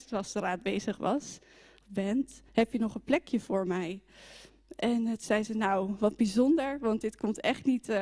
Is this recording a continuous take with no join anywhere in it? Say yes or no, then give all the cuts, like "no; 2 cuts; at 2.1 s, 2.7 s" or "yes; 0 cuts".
no; 1 cut; at 2.5 s